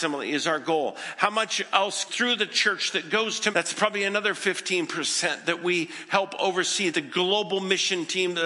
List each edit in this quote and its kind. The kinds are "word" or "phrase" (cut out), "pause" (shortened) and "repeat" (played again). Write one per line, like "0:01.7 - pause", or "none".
0:02.1 - word
0:03.5 - word
0:06.9 - word